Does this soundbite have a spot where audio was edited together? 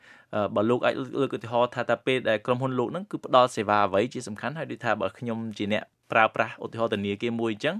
no; 0 cuts

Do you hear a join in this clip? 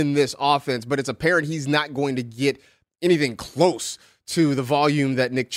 no; 0 cuts

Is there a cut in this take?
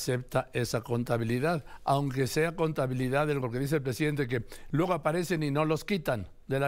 yes; 1 cut; at 3.4 s

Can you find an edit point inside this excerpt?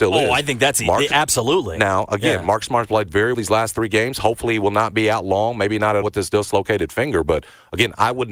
yes; 2 cuts; at 3.3 s, 6.0 s

